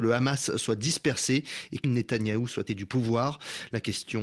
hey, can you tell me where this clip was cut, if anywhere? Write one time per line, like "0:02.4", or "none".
0:01.8
0:02.7